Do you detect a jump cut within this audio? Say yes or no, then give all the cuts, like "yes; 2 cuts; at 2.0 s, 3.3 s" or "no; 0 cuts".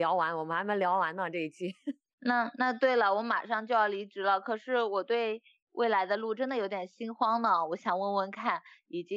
no; 0 cuts